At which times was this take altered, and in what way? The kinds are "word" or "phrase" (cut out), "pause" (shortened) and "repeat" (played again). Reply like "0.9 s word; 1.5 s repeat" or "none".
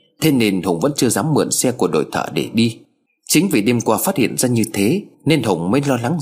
3.1 s pause; 5.1 s pause